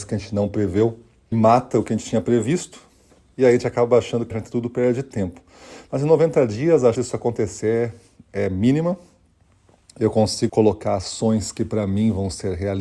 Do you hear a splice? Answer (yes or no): yes